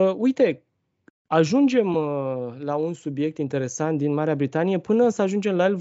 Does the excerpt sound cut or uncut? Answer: uncut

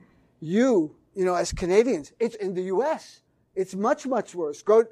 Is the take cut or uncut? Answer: cut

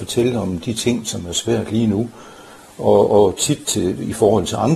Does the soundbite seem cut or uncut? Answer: uncut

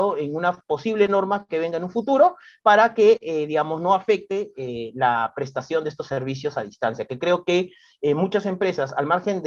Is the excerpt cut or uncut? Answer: uncut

